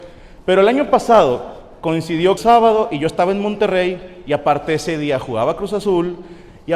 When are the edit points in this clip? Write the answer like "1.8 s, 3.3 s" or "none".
2.4 s